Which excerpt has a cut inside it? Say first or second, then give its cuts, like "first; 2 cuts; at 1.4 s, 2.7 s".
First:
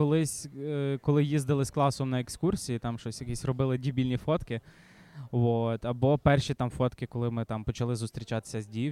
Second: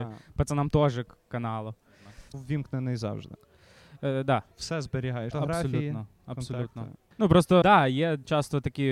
second; 5 cuts; at 2.3 s, 4.5 s, 5.3 s, 7.1 s, 7.6 s